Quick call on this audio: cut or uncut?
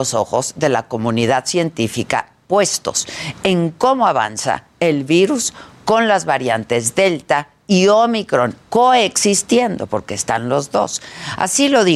uncut